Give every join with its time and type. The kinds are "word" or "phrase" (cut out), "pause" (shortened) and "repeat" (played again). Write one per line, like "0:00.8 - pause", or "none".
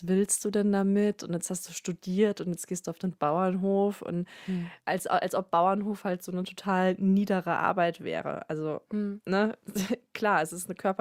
0:04.8 - pause